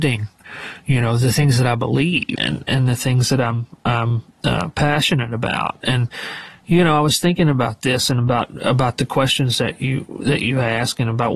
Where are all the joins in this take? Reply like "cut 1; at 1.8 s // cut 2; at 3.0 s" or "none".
cut 1; at 2.4 s // cut 2; at 4.3 s